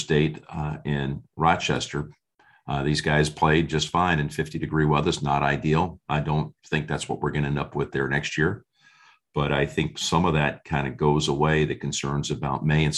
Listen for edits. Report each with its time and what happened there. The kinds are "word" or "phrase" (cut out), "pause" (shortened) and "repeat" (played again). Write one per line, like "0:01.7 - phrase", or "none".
none